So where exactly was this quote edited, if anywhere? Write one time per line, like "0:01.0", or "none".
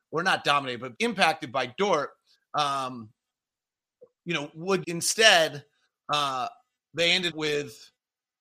0:00.9
0:04.8
0:07.3